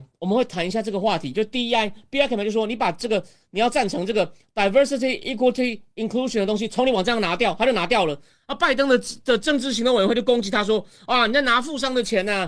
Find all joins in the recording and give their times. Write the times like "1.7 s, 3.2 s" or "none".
none